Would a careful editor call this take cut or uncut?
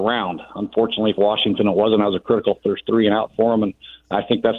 cut